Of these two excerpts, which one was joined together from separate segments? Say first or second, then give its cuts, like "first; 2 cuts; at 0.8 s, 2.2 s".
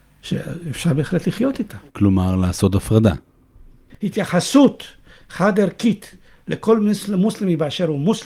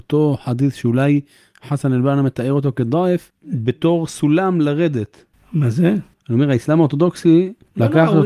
first; 1 cut; at 1.9 s